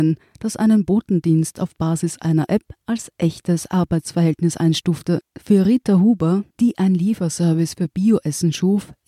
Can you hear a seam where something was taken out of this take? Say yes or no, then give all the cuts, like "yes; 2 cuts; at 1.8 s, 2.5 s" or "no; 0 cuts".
yes; 2 cuts; at 5.3 s, 6.5 s